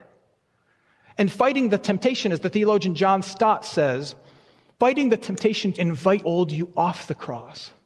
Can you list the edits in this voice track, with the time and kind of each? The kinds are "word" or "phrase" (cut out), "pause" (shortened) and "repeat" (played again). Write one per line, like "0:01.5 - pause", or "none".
0:05.7 - word
0:06.2 - word